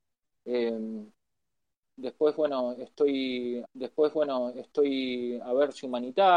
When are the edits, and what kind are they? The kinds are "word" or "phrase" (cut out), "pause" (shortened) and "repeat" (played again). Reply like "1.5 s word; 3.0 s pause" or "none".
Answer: 3.6 s repeat